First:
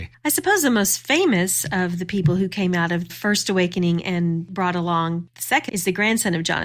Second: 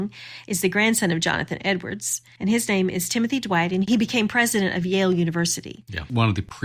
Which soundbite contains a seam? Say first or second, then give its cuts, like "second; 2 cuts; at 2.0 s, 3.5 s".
first; 2 cuts; at 3.1 s, 5.7 s